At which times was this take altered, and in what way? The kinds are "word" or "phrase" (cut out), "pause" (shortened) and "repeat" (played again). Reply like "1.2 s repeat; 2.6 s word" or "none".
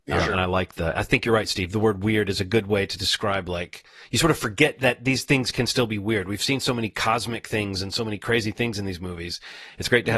none